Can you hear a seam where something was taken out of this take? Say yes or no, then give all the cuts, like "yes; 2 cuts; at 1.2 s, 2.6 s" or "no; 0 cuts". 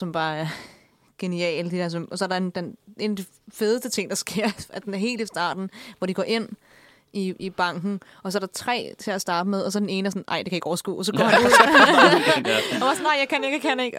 no; 0 cuts